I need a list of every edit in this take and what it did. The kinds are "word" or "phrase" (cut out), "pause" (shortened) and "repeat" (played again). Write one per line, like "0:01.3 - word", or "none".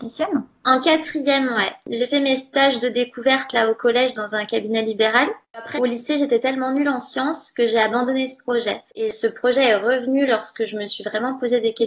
0:05.8 - word